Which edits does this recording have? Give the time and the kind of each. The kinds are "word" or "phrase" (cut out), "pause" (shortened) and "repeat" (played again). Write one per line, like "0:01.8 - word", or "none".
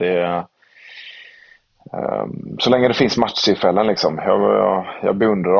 none